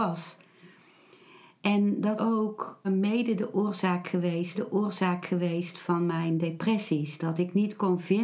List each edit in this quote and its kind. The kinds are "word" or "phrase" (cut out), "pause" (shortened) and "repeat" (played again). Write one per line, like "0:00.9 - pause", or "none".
0:02.2 - word
0:02.8 - word
0:04.5 - repeat

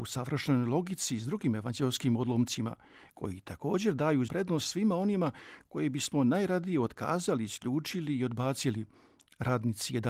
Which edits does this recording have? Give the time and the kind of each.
0:04.3 - word

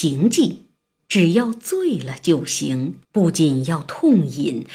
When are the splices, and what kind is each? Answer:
0:03.0 - pause

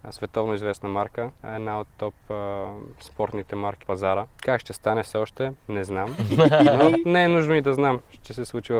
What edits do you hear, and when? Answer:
0:01.4 - pause
0:01.9 - pause
0:03.8 - word
0:04.3 - pause

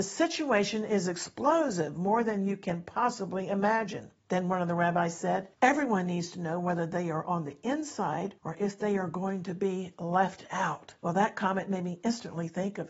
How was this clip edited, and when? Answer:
0:04.2 - pause
0:05.5 - pause
0:08.4 - pause
0:11.0 - pause

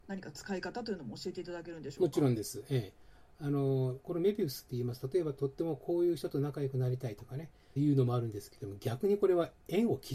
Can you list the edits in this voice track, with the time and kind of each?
0:07.8 - phrase

